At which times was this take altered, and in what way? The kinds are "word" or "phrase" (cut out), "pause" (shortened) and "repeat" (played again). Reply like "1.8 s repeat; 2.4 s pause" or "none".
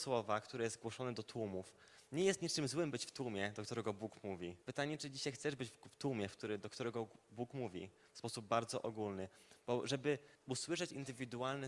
4.6 s pause; 10.3 s pause